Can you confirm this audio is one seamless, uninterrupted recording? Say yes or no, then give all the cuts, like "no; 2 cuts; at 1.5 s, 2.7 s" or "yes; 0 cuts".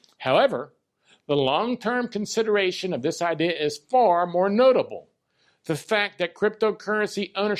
yes; 0 cuts